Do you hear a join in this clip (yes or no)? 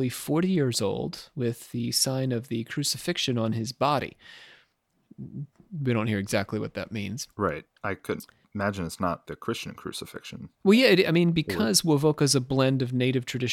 yes